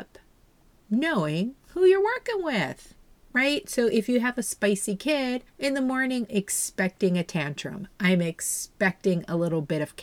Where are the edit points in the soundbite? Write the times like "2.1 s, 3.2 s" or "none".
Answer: 1.6 s, 3.2 s, 5.5 s, 6.3 s